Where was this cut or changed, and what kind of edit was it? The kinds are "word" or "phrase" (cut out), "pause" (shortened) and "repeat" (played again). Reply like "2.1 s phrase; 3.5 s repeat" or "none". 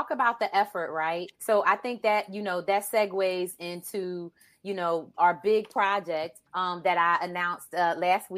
1.3 s pause; 5.1 s word; 6.5 s pause